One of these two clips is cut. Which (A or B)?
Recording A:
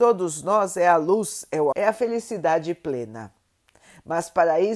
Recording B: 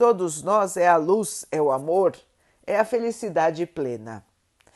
A